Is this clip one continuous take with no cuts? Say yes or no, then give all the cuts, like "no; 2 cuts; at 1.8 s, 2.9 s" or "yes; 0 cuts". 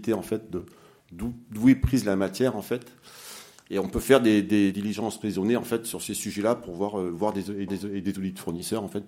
no; 2 cuts; at 4.7 s, 7.7 s